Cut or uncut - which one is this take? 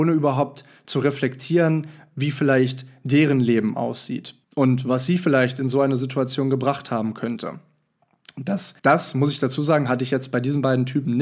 cut